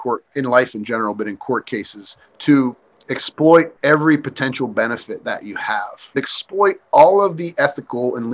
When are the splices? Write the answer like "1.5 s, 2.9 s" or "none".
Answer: 2.3 s

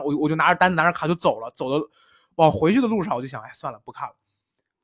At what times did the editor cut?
none

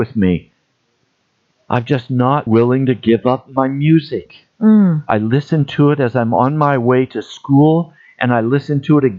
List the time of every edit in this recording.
2.5 s, 4.5 s

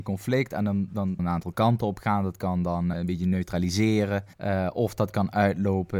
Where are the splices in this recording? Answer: 1.2 s, 2.9 s, 4.3 s

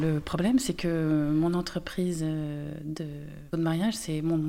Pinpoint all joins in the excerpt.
3.5 s

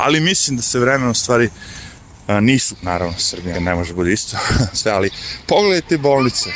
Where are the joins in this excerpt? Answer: 2.8 s, 3.5 s, 4.7 s

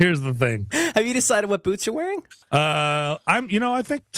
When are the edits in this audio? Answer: 2.4 s

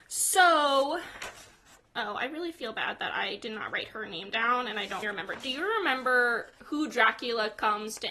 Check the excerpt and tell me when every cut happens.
5.0 s

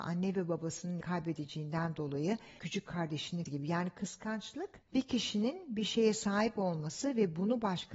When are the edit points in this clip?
1.0 s, 3.5 s

